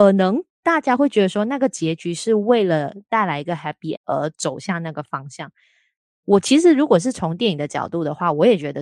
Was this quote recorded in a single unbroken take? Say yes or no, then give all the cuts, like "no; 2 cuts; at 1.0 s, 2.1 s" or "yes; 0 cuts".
no; 1 cut; at 4.0 s